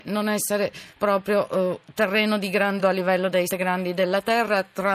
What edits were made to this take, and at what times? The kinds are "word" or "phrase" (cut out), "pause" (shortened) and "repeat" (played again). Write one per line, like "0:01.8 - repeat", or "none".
0:02.8 - word
0:03.5 - word